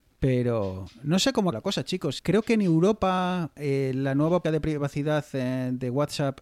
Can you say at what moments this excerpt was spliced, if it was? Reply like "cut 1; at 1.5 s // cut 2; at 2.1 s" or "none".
cut 1; at 1.5 s // cut 2; at 2.2 s // cut 3; at 4.4 s